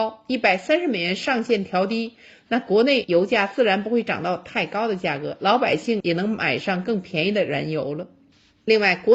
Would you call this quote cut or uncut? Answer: uncut